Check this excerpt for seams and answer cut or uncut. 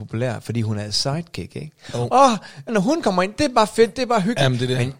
cut